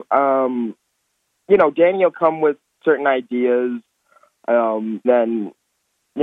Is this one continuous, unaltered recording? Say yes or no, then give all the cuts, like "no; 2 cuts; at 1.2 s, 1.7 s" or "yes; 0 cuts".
no; 1 cut; at 5.0 s